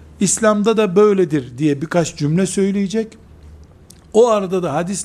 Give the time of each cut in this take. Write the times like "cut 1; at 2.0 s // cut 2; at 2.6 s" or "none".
none